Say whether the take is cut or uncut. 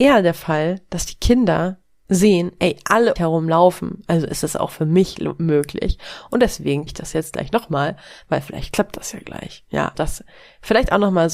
cut